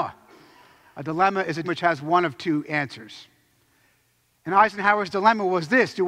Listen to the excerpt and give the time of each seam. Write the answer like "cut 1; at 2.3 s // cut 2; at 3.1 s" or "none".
cut 1; at 1.6 s